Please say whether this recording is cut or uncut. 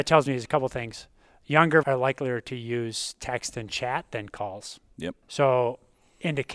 cut